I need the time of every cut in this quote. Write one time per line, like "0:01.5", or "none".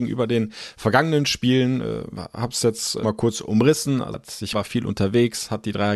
0:03.0
0:04.1
0:04.5